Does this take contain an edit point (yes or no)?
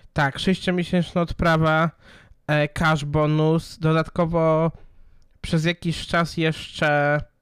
no